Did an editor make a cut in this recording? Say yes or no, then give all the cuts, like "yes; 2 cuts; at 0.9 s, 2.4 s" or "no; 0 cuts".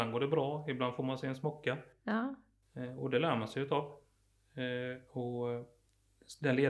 no; 0 cuts